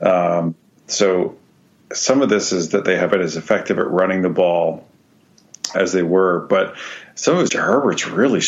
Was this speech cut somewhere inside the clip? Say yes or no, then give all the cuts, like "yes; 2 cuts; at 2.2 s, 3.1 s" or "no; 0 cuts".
yes; 3 cuts; at 3.1 s, 5.7 s, 7.5 s